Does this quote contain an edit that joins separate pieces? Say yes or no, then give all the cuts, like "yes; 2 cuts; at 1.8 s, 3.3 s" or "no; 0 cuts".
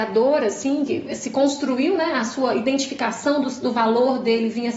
no; 0 cuts